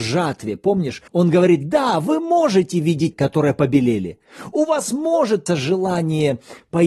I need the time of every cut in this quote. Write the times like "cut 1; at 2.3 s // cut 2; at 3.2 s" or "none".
cut 1; at 1.1 s // cut 2; at 3.1 s // cut 3; at 5.5 s